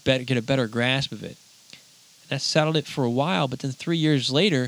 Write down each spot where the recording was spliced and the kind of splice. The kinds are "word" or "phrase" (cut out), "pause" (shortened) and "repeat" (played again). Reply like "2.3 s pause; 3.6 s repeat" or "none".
none